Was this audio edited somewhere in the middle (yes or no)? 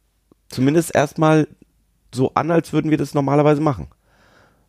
no